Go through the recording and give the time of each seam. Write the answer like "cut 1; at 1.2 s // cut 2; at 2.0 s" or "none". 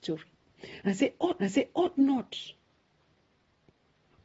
cut 1; at 1.4 s